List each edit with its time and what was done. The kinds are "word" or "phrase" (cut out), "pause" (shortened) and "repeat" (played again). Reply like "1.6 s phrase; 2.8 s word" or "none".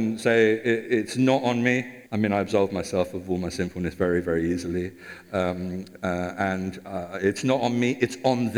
2.1 s pause